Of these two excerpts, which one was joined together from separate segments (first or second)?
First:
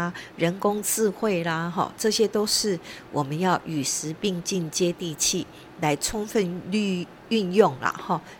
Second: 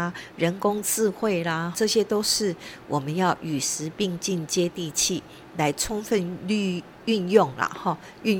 second